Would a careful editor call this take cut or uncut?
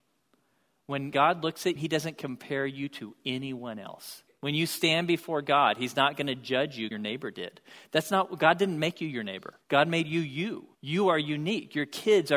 cut